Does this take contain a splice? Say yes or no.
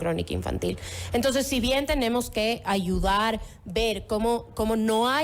no